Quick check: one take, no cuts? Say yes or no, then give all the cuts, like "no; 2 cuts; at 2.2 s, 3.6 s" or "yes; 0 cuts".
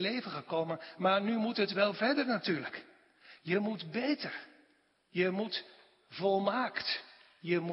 yes; 0 cuts